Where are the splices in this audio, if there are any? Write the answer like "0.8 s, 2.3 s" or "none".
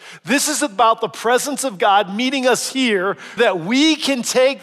3.4 s